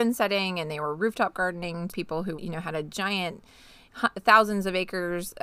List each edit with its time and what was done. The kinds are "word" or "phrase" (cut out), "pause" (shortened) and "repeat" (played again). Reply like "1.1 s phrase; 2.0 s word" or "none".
1.9 s word; 2.3 s word